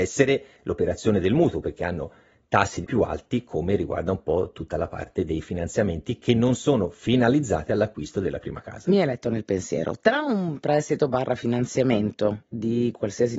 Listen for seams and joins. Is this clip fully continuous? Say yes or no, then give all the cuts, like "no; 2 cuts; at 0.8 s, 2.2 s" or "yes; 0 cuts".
no; 1 cut; at 2.8 s